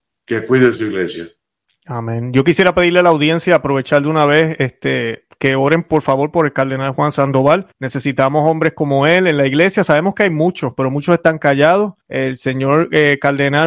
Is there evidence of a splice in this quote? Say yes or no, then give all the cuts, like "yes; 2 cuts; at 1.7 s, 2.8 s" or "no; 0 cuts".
yes; 3 cuts; at 1.4 s, 7.7 s, 12.0 s